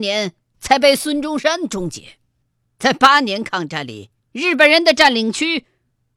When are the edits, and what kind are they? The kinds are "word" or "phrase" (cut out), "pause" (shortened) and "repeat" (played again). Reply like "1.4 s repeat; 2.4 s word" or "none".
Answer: 2.4 s pause; 4.2 s pause

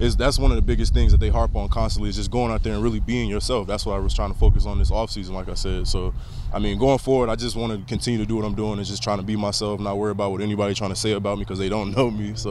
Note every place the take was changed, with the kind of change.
none

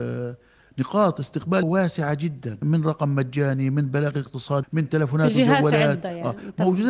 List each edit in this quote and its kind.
1.6 s word; 2.6 s word; 4.6 s word

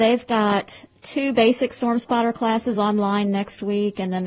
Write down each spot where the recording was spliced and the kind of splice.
none

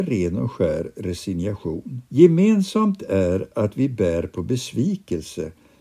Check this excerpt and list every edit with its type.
2.1 s pause

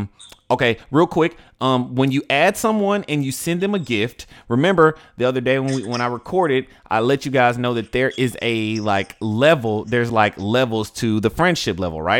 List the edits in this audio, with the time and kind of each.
none

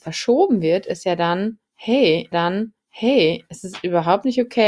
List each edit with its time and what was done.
2.3 s repeat

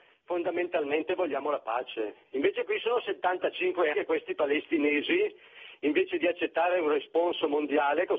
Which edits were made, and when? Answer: 3.9 s word

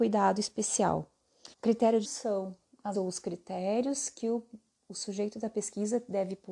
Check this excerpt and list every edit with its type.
1.5 s pause; 2.0 s word; 2.9 s word

